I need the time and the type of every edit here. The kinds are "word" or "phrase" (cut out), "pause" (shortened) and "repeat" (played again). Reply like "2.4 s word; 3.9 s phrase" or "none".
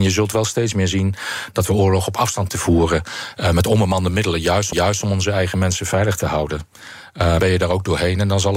2.5 s word; 4.7 s repeat; 7.4 s phrase